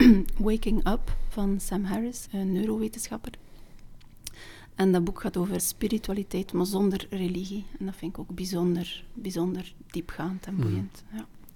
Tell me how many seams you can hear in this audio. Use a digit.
2